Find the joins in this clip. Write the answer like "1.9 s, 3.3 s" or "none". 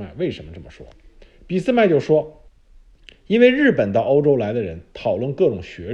2.5 s